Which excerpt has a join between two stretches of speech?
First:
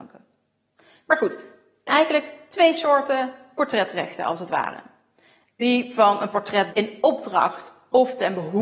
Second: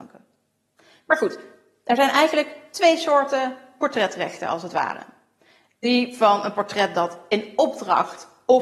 first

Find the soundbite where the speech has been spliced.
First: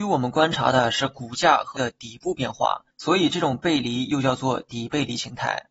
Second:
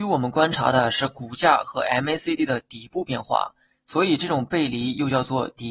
first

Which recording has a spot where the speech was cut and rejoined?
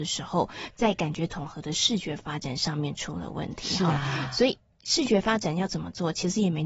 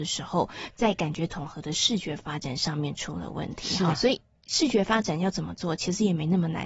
second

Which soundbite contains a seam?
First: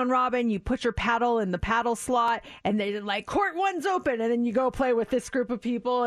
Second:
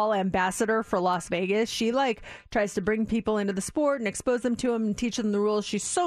first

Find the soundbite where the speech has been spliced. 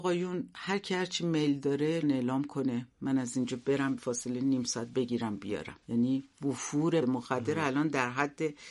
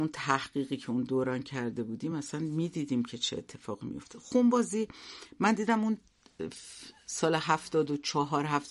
first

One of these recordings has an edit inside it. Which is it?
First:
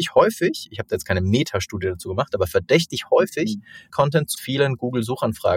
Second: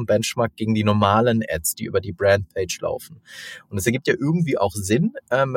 first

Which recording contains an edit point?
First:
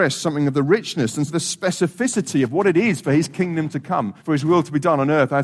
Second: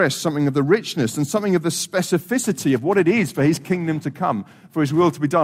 first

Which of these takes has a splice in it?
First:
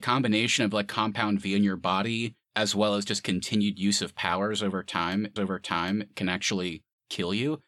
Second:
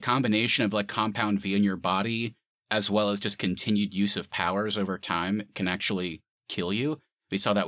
first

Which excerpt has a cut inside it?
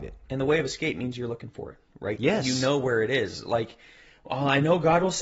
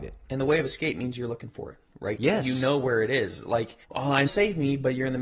second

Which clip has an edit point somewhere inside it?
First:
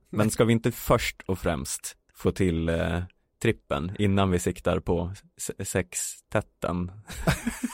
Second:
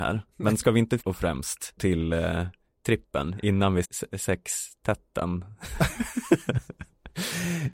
second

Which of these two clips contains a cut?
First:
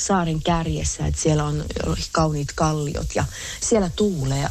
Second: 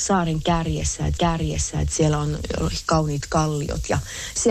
second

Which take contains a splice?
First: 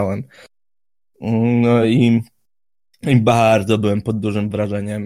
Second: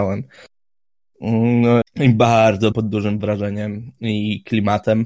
second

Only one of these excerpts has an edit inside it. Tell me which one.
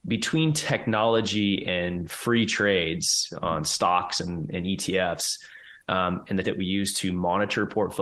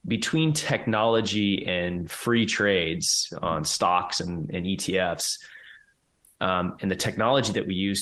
first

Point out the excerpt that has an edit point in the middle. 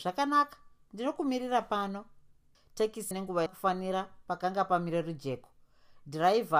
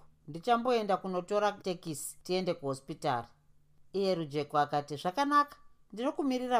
first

